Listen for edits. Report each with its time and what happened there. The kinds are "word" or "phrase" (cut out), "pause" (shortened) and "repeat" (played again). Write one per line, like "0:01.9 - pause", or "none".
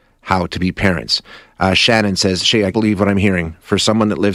0:02.7 - word